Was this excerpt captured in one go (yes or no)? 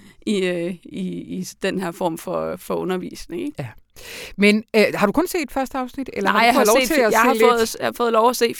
yes